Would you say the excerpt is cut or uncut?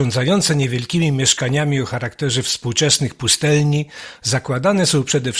uncut